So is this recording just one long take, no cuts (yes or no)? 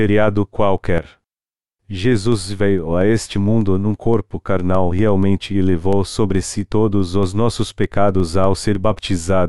yes